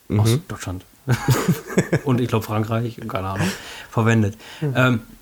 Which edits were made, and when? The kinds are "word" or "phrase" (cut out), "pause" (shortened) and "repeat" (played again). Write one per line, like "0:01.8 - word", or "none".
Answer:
none